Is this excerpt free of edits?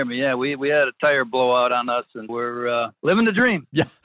no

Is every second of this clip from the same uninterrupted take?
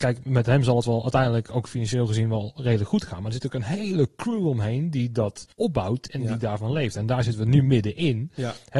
no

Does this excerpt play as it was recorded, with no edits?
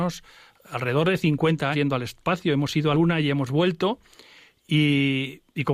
no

